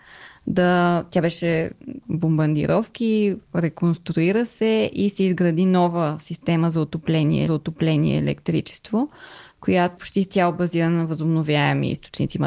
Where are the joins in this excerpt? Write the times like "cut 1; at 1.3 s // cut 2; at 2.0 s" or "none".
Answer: cut 1; at 2.0 s // cut 2; at 7.5 s // cut 3; at 10.0 s